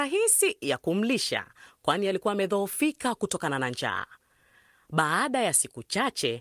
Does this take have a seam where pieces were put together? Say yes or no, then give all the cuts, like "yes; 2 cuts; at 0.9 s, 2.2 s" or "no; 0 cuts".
no; 0 cuts